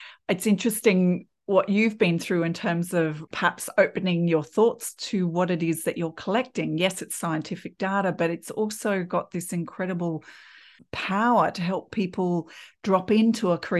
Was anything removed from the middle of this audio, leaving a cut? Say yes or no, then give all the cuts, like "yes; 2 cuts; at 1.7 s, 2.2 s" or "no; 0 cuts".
no; 0 cuts